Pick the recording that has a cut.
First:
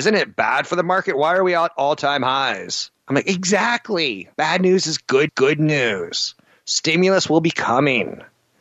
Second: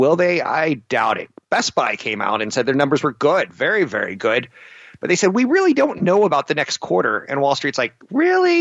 first; 3 cuts; at 3.0 s, 4.3 s, 5.3 s

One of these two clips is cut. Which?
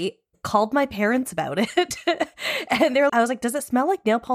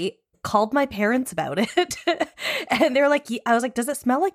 first; 1 cut; at 3.1 s

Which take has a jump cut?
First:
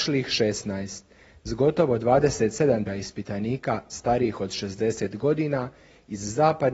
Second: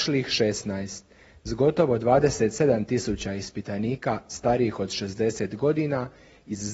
first; 1 cut; at 2.9 s

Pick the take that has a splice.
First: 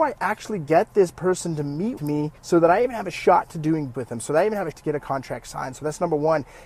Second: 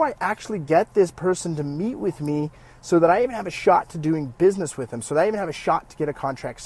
first; 4 cuts; at 2.0 s, 2.4 s, 3.9 s, 4.7 s

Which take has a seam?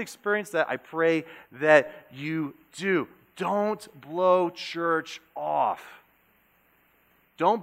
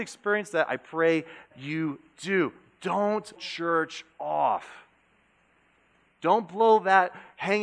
second; 2 cuts; at 1.5 s, 3.4 s

